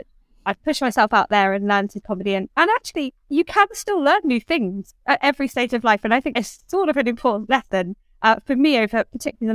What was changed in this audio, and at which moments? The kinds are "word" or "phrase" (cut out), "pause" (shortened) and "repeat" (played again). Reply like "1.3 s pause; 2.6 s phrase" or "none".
2.0 s word; 3.2 s pause; 5.0 s pause; 6.3 s word